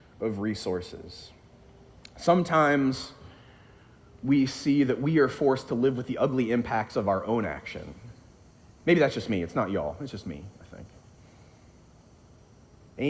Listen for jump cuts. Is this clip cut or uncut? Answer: uncut